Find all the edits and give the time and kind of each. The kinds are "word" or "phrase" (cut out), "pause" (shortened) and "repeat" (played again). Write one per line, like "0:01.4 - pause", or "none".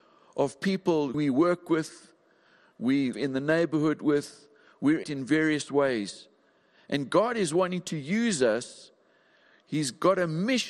0:01.1 - word
0:03.1 - word
0:05.0 - word